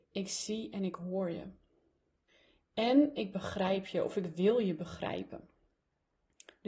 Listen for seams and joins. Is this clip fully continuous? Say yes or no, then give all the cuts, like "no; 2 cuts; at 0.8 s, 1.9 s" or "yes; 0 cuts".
yes; 0 cuts